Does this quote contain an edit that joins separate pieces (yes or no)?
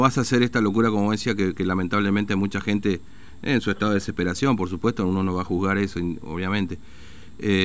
no